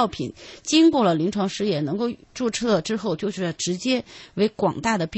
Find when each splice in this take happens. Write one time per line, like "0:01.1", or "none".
0:02.2